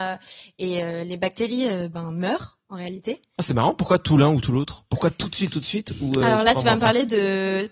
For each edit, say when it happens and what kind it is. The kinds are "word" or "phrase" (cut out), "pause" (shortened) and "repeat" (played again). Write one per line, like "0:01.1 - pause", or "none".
none